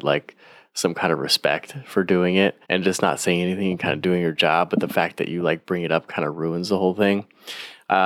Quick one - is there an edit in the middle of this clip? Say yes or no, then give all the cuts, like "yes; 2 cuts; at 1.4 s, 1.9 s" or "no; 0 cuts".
yes; 1 cut; at 2.6 s